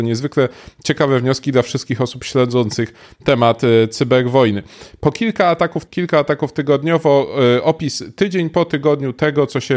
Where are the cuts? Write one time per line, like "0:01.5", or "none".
0:05.9